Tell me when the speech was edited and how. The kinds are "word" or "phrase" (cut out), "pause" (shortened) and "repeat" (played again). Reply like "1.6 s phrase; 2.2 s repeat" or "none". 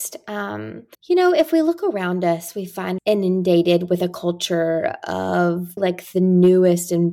0.9 s pause; 3.0 s word; 5.8 s word